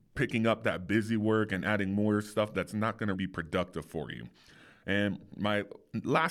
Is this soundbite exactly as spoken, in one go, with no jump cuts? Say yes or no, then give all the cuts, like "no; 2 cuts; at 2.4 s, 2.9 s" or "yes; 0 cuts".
no; 1 cut; at 3.2 s